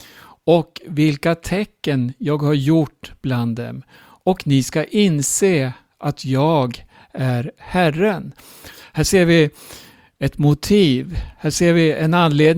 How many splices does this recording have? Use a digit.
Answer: 0